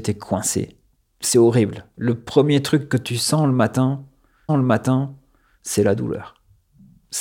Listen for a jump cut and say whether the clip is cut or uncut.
cut